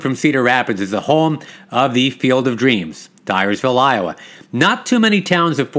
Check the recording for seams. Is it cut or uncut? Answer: uncut